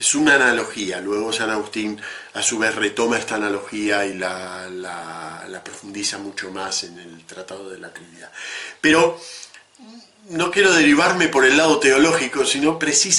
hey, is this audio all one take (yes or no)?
yes